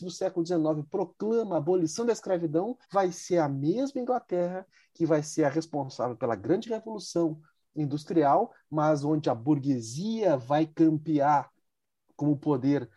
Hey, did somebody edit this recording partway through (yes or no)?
yes